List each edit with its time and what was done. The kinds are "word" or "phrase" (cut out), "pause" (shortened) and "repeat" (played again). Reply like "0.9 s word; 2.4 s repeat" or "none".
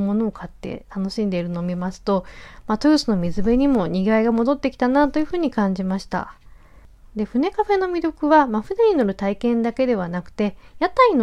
none